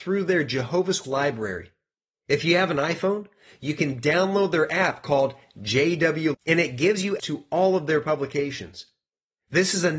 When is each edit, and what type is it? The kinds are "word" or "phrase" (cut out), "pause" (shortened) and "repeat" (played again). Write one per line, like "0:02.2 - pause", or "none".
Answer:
0:01.0 - word
0:06.3 - word
0:07.2 - word